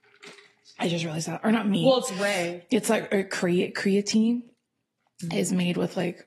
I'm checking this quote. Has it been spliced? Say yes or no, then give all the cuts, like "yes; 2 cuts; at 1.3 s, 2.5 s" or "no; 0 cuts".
no; 0 cuts